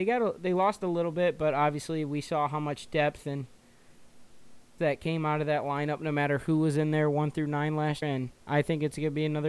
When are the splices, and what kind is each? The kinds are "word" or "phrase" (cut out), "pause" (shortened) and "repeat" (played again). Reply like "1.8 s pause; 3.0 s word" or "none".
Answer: 4.8 s word; 8.0 s word